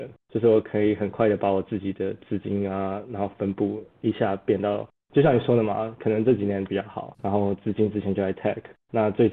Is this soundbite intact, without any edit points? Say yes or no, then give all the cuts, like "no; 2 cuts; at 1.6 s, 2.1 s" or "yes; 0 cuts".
no; 2 cuts; at 6.7 s, 7.2 s